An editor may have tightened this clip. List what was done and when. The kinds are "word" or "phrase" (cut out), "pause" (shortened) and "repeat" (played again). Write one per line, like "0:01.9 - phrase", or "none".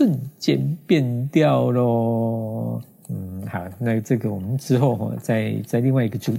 none